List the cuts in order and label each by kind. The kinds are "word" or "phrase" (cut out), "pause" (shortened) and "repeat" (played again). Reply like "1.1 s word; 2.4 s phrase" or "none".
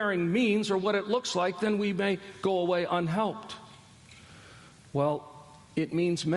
none

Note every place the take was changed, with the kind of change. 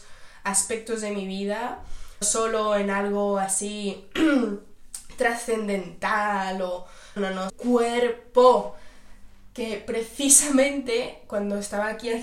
2.2 s word; 7.2 s word; 7.5 s phrase

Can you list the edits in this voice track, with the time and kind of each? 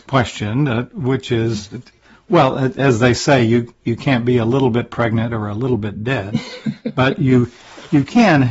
none

